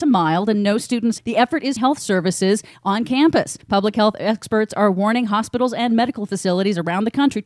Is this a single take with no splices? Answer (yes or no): no